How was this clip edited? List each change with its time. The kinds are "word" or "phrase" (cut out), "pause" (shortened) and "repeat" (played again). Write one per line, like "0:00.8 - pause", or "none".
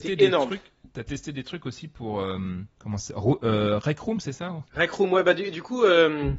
0:02.7 - pause
0:04.7 - pause